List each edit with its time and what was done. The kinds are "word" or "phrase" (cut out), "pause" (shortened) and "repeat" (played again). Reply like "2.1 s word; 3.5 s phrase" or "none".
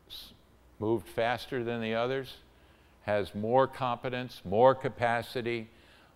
none